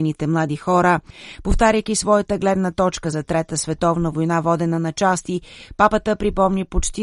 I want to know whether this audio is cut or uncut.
uncut